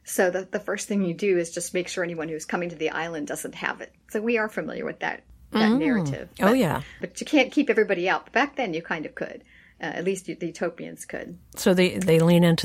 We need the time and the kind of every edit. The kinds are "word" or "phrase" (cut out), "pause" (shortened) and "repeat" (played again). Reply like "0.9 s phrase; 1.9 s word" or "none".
7.0 s word